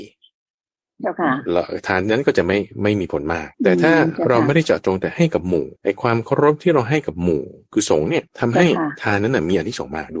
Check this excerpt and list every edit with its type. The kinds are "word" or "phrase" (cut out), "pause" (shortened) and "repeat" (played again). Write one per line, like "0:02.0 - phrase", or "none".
0:03.5 - pause
0:05.8 - pause
0:08.3 - pause